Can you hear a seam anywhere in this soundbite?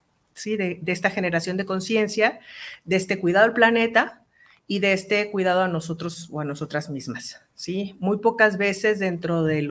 no; 0 cuts

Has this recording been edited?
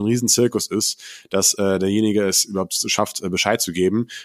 no; 0 cuts

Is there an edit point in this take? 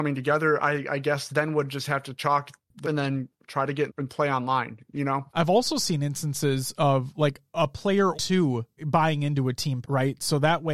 yes; 6 cuts; at 2.8 s, 3.9 s, 5.3 s, 8.1 s, 8.8 s, 9.8 s

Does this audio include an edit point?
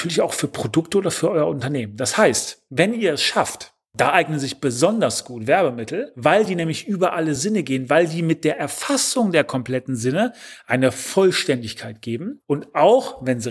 no; 0 cuts

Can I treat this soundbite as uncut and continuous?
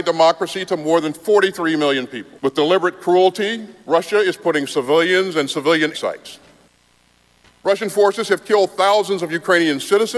no; 3 cuts; at 2.4 s, 3.8 s, 5.9 s

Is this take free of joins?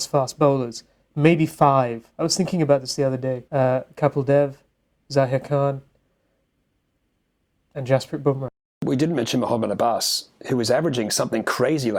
no; 2 cuts; at 3.5 s, 10.4 s

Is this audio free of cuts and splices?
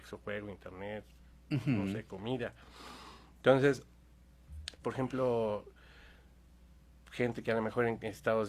no; 1 cut; at 4.8 s

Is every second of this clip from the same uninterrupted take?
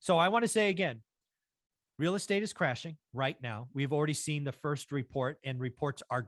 yes; 0 cuts

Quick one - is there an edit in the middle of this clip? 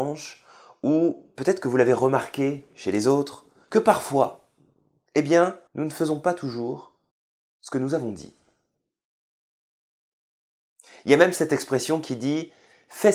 yes; 3 cuts; at 3.6 s, 5.7 s, 7.1 s

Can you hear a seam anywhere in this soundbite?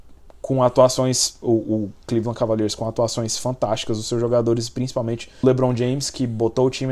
yes; 1 cut; at 5.4 s

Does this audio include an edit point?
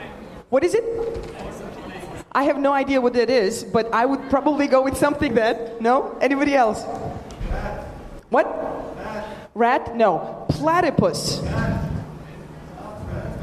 yes; 1 cut; at 5.3 s

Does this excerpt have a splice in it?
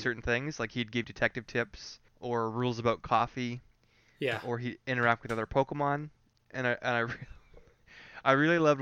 yes; 2 cuts; at 1.0 s, 2.1 s

